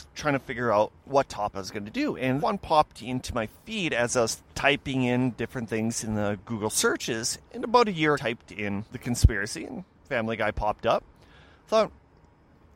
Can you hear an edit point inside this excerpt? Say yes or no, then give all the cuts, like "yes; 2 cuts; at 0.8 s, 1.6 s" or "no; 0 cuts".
yes; 8 cuts; at 1.0 s, 1.5 s, 2.4 s, 4.5 s, 7.4 s, 8.1 s, 8.9 s, 9.9 s